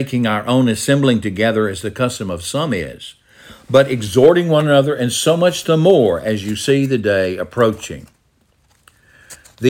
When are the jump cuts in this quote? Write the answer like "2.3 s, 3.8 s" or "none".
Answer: none